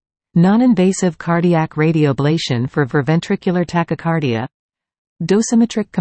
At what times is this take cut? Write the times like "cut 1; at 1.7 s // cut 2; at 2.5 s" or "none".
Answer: cut 1; at 2.9 s